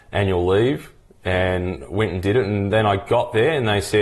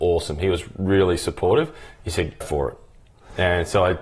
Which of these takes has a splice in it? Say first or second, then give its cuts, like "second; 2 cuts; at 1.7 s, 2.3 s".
second; 1 cut; at 2.4 s